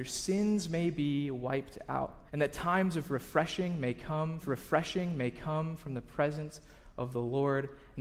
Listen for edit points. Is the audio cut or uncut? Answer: cut